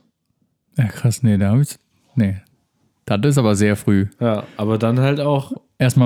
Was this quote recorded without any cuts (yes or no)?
yes